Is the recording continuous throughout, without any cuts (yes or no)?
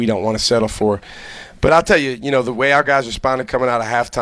yes